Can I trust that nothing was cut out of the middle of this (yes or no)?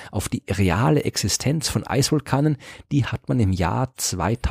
yes